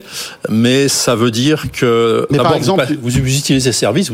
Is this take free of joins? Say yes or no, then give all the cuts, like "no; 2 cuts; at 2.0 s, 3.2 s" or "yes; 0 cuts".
no; 1 cut; at 2.3 s